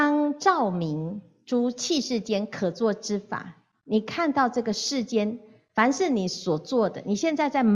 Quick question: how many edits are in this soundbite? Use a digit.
1